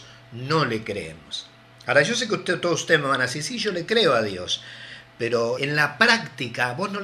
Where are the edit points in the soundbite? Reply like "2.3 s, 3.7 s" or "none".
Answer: 5.6 s